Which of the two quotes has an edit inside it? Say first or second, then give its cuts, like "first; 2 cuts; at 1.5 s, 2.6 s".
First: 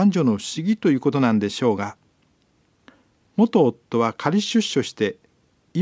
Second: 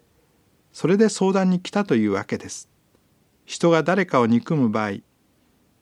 second; 1 cut; at 3.2 s